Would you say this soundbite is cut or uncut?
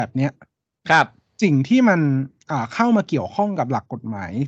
uncut